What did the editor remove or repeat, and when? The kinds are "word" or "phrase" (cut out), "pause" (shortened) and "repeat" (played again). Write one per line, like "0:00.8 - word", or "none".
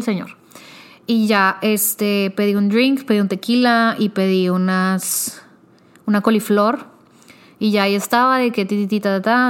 none